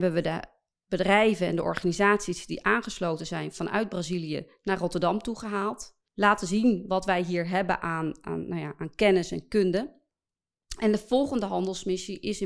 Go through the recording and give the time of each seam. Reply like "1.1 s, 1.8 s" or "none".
6.1 s

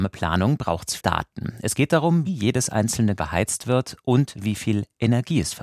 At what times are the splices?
1.0 s, 2.3 s, 3.2 s

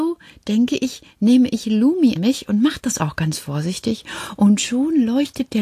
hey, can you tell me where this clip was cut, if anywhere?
2.2 s

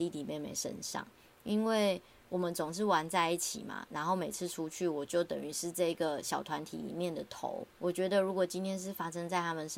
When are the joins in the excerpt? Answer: 7.7 s

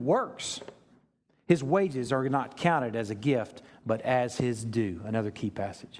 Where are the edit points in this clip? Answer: none

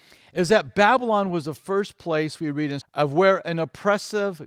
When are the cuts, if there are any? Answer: 2.8 s

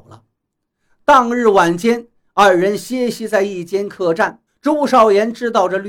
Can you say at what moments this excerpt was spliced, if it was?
4.5 s

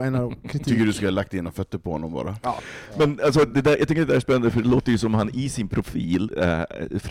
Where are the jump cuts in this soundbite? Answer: none

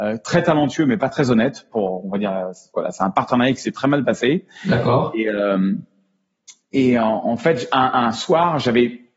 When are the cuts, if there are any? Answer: none

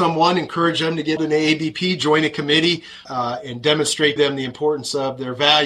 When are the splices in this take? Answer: 1.2 s, 3.0 s, 4.2 s

